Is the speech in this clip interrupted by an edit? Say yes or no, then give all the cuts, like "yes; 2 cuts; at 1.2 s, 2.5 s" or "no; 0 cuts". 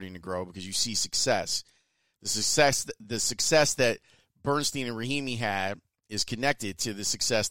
yes; 1 cut; at 6.0 s